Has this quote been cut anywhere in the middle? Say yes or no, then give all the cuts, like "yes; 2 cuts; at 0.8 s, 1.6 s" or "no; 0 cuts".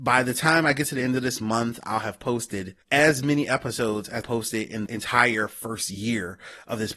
yes; 3 cuts; at 2.8 s, 4.2 s, 4.9 s